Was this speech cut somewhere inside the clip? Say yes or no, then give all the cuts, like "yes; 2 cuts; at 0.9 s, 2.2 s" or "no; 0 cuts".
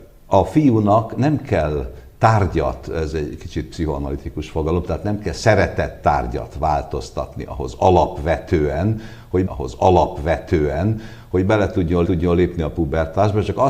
yes; 2 cuts; at 9.5 s, 12.0 s